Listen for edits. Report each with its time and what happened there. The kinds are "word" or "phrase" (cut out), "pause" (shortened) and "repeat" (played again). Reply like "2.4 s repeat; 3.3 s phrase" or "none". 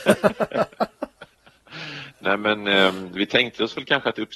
2.1 s word

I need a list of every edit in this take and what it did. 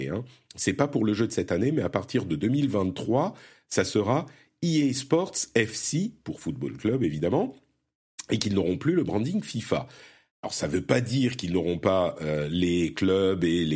none

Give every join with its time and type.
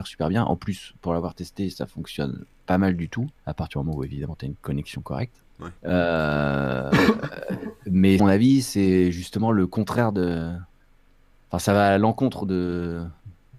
3.4 s pause; 5.8 s pause; 8.2 s phrase

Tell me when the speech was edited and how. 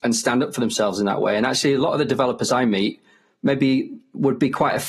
none

